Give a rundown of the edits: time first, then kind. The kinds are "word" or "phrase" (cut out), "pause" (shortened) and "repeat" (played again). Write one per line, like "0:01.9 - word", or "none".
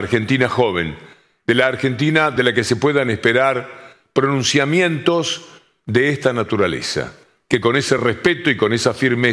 none